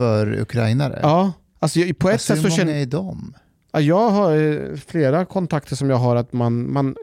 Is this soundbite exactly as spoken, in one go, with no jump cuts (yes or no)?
yes